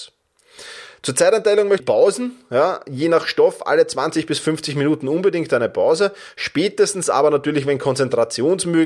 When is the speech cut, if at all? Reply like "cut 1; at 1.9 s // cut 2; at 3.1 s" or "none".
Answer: cut 1; at 1.8 s